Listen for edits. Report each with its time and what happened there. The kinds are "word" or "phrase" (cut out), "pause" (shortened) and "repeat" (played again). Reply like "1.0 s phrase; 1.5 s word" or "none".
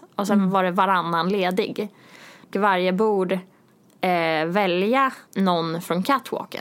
2.5 s word; 5.3 s pause